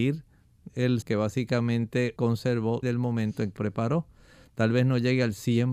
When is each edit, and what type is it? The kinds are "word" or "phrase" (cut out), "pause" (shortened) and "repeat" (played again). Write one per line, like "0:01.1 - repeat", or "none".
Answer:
0:01.0 - word
0:02.2 - word
0:02.8 - word
0:03.6 - word